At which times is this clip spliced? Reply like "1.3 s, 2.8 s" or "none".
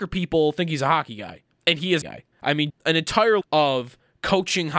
1.5 s, 2.0 s, 2.3 s, 2.7 s, 3.4 s